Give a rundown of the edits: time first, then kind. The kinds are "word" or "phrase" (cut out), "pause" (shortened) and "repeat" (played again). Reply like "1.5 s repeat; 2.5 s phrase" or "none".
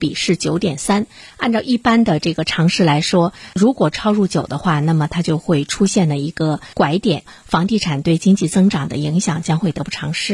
6.7 s pause